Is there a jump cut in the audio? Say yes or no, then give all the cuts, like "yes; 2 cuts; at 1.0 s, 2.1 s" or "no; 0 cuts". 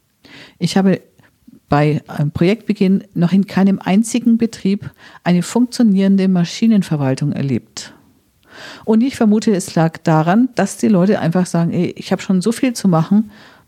no; 0 cuts